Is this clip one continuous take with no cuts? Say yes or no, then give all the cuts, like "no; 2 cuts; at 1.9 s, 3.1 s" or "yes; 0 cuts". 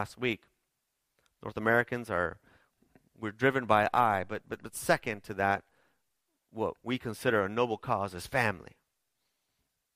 yes; 0 cuts